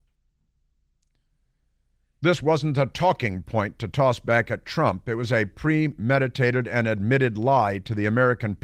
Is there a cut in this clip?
no; 0 cuts

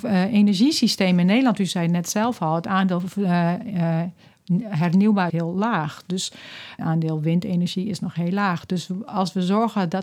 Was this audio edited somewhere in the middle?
yes; 2 cuts; at 5.3 s, 6.8 s

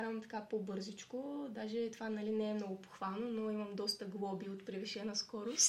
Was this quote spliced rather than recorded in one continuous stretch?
no; 0 cuts

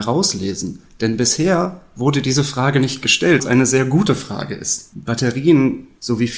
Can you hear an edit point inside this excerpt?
yes; 1 cut; at 3.4 s

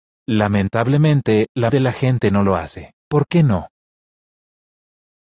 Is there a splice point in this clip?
yes; 2 cuts; at 1.7 s, 3.0 s

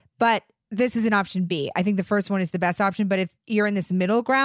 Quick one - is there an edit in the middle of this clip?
no; 0 cuts

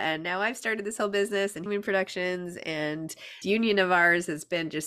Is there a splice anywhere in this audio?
yes; 2 cuts; at 1.7 s, 3.4 s

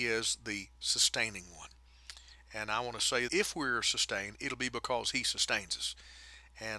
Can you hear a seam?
yes; 1 cut; at 3.3 s

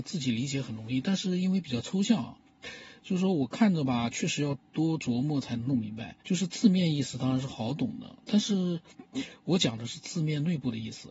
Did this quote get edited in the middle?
yes; 2 cuts; at 6.2 s, 8.2 s

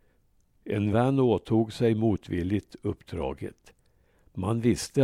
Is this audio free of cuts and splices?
yes; 0 cuts

